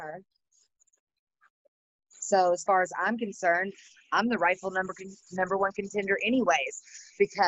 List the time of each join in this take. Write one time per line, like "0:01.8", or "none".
none